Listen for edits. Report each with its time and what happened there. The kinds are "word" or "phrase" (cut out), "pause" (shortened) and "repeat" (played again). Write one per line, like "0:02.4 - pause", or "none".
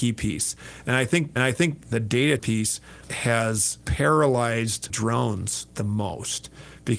0:01.4 - repeat
0:02.4 - word
0:04.9 - word